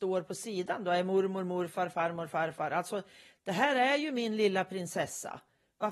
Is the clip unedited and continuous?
yes; 0 cuts

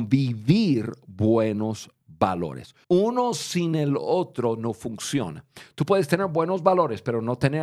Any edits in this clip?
yes; 1 cut; at 2.8 s

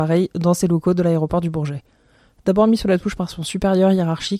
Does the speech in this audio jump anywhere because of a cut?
no; 0 cuts

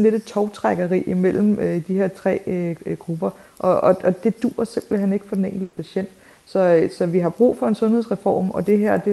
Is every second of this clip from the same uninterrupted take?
yes; 0 cuts

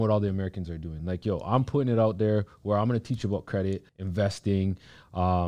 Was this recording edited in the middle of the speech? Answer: yes; 1 cut; at 3.9 s

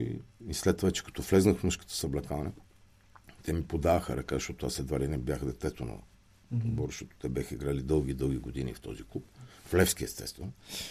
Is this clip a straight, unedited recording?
yes; 0 cuts

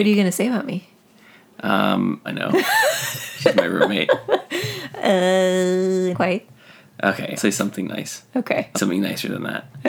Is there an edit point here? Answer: yes; 4 cuts; at 2.2 s, 6.1 s, 7.4 s, 8.7 s

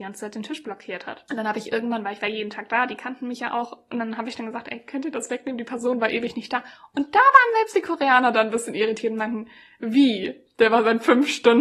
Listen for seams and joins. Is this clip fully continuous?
yes; 0 cuts

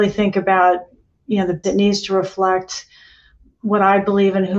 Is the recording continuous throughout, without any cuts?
no; 1 cut; at 1.6 s

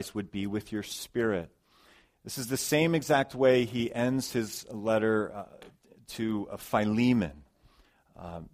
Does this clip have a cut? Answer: no; 0 cuts

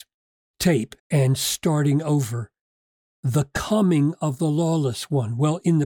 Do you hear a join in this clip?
yes; 1 cut; at 1.0 s

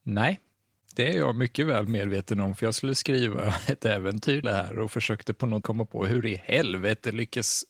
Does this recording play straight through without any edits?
no; 2 cuts; at 4.4 s, 5.6 s

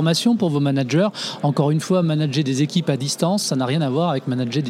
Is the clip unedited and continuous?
yes; 0 cuts

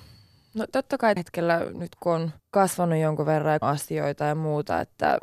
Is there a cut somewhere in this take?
yes; 3 cuts; at 1.2 s, 2.4 s, 3.6 s

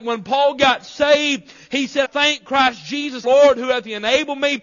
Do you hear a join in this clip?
yes; 2 cuts; at 2.0 s, 3.2 s

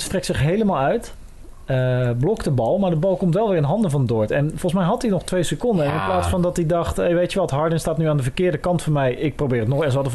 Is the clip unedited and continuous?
yes; 0 cuts

